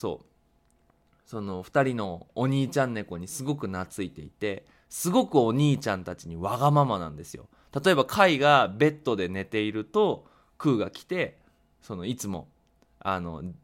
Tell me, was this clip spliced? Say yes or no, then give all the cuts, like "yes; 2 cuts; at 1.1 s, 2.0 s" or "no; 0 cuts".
no; 0 cuts